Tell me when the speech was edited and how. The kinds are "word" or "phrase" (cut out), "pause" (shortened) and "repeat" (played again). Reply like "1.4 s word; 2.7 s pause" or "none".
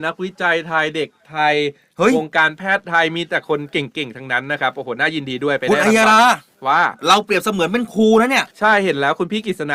8.5 s pause